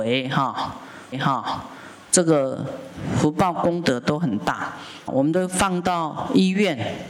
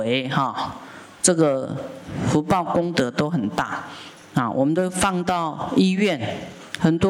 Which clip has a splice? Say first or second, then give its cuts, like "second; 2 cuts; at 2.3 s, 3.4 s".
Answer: first; 2 cuts; at 1.1 s, 5.1 s